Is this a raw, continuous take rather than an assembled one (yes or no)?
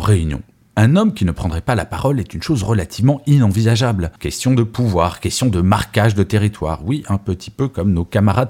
no